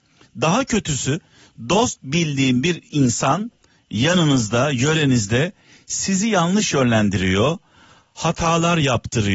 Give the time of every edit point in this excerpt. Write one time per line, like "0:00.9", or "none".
none